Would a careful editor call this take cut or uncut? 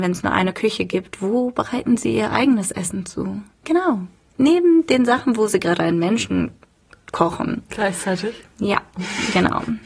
uncut